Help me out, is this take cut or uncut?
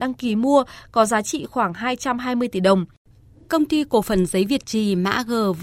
uncut